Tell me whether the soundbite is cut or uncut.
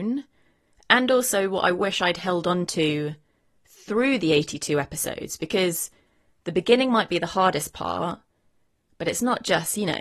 uncut